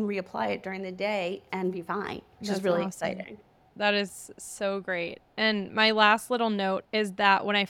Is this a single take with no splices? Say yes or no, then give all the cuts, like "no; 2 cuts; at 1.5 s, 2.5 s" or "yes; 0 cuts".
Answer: no; 1 cut; at 2.3 s